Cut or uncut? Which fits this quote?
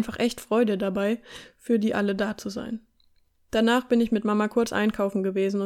uncut